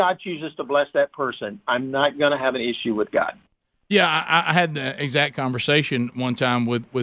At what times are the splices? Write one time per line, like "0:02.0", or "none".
0:03.6